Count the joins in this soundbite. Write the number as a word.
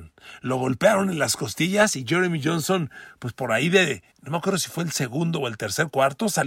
one